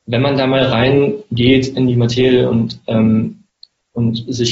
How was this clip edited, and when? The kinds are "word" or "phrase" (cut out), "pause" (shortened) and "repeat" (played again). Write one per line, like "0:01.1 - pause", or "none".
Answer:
none